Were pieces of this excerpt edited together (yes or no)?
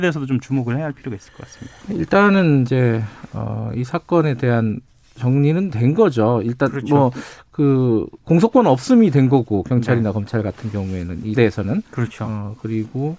yes